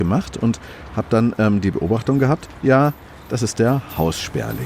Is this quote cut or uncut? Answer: uncut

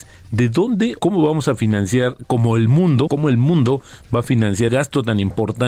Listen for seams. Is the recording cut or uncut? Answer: cut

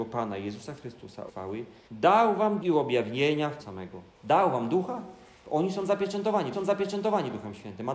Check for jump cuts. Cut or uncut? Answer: cut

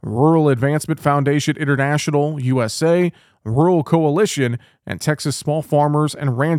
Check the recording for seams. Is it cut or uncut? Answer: uncut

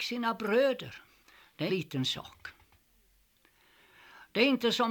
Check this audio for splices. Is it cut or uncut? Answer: cut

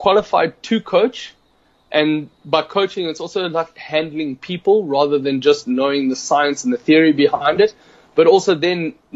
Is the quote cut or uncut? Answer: uncut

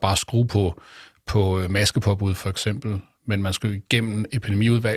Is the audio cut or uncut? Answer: uncut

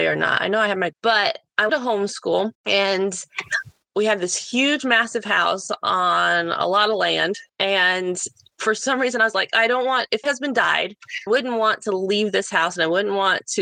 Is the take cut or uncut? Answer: cut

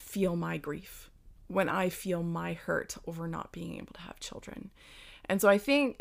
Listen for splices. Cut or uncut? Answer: uncut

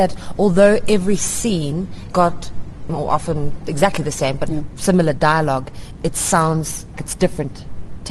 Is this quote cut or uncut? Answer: cut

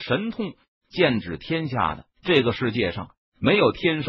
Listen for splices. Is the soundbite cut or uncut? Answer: cut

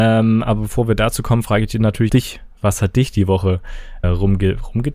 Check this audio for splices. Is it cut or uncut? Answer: cut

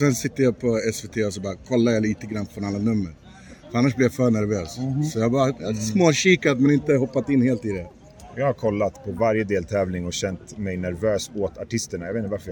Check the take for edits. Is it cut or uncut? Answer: uncut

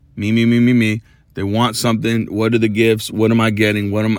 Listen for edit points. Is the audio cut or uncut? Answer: uncut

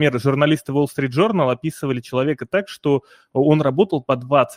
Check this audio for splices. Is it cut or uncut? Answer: uncut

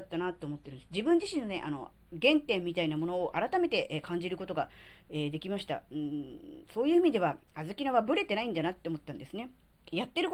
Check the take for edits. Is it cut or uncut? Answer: cut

